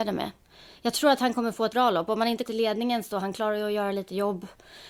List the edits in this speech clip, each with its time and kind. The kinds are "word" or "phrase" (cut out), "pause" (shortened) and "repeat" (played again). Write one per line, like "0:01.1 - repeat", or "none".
0:01.7 - word
0:02.5 - word